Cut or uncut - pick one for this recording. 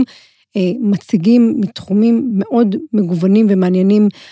uncut